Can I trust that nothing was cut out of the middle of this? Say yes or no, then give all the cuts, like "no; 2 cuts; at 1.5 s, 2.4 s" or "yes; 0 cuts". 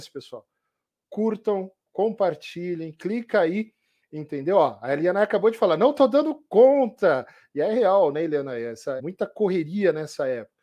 no; 1 cut; at 9.0 s